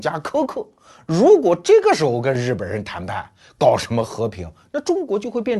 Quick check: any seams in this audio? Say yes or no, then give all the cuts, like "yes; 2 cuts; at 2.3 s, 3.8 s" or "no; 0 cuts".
no; 0 cuts